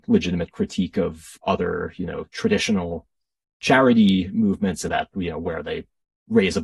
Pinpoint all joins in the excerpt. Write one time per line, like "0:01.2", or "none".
0:04.9